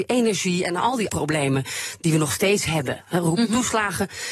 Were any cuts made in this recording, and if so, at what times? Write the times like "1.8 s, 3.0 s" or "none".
1.1 s

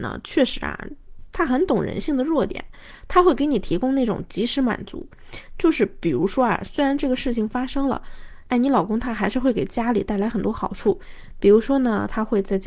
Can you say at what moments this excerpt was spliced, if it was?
8.5 s

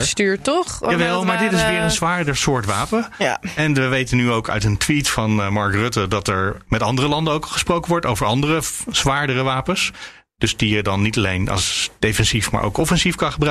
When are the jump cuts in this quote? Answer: none

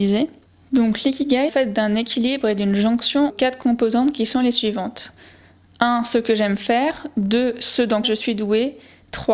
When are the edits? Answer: 1.5 s, 3.3 s, 8.0 s

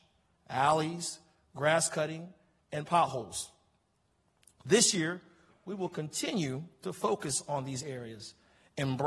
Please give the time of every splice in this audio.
none

